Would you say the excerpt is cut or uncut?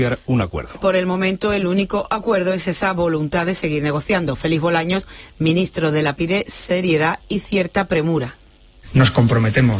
cut